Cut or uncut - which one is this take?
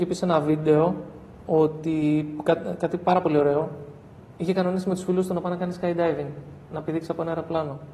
uncut